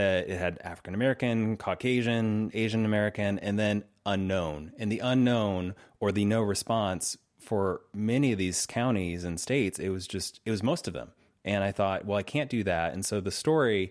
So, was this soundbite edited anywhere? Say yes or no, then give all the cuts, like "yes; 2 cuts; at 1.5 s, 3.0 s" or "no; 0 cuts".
no; 0 cuts